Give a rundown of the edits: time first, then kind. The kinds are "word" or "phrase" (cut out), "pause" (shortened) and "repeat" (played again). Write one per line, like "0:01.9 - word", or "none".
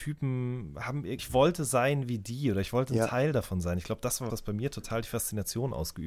0:01.2 - word
0:04.3 - word